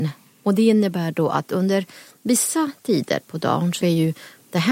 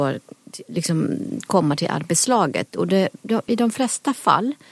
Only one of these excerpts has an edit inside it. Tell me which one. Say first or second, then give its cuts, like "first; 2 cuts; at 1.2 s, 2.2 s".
first; 1 cut; at 3.8 s